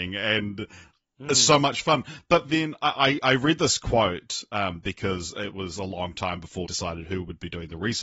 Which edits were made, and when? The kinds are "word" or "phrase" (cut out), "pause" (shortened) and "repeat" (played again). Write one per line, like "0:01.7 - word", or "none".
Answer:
0:06.7 - word